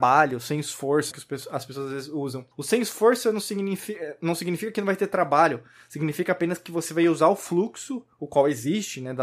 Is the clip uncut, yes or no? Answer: no